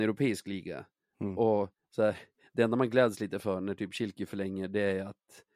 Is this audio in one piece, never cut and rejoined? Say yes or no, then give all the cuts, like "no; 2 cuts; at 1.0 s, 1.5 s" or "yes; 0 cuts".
yes; 0 cuts